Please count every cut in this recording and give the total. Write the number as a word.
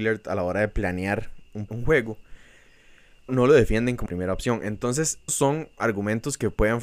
four